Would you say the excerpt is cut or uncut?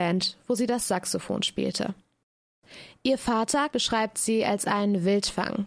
cut